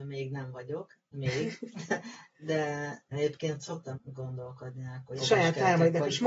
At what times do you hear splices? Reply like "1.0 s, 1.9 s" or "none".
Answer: 3.1 s, 3.9 s, 5.2 s